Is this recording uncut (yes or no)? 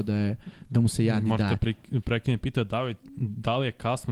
yes